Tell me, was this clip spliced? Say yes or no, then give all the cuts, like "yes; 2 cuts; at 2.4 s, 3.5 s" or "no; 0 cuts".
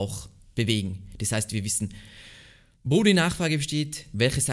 no; 0 cuts